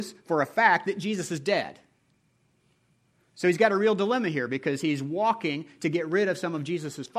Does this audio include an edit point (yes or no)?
no